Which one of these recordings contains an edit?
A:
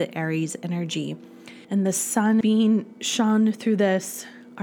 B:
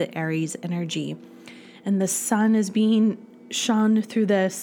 A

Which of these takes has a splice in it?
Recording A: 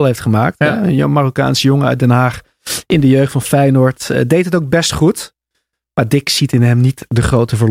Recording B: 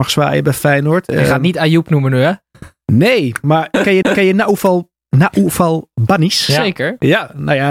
B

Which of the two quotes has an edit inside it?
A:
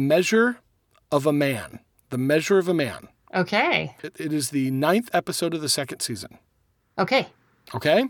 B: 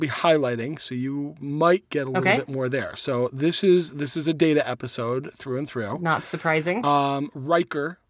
A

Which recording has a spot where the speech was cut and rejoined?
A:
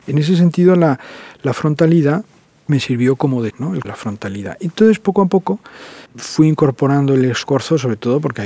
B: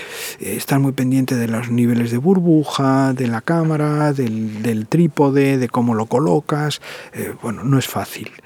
A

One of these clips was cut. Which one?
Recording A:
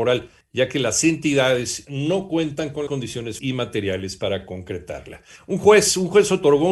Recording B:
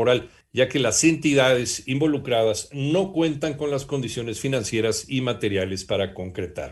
A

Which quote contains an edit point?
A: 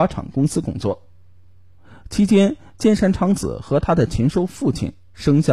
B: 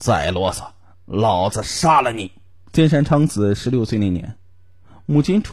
B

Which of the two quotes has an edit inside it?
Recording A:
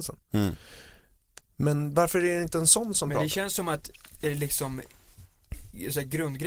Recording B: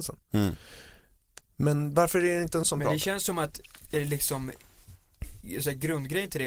B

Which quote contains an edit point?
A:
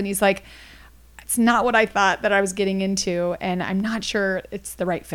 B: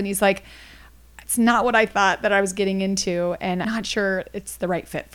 B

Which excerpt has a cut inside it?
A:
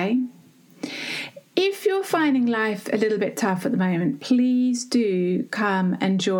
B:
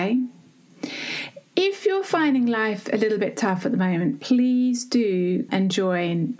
B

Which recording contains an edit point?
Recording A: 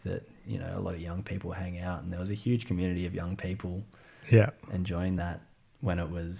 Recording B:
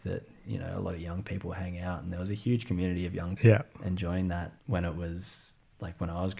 B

